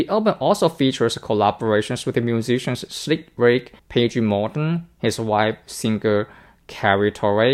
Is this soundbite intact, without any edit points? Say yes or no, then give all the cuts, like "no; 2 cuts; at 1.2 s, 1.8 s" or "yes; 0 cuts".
no; 1 cut; at 3.8 s